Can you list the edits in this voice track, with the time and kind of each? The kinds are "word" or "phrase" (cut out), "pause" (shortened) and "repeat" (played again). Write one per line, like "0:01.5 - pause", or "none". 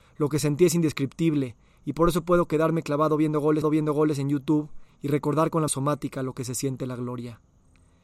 0:03.6 - repeat
0:05.7 - word